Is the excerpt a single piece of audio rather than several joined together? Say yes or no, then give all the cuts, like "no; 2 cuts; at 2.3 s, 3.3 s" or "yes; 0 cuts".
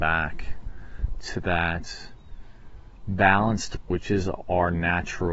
no; 1 cut; at 3.8 s